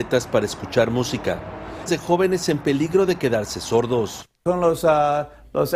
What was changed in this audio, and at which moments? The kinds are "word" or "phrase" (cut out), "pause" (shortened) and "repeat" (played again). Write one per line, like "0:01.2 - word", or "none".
0:01.9 - phrase